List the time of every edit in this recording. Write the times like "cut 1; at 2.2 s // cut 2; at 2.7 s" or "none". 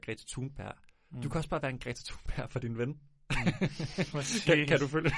none